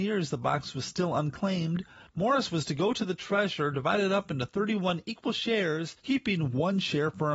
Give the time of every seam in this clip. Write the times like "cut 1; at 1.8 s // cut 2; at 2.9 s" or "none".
cut 1; at 6.0 s